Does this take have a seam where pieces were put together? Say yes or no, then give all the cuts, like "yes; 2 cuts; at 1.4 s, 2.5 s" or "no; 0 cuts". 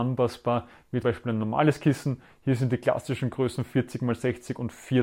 yes; 1 cut; at 1.0 s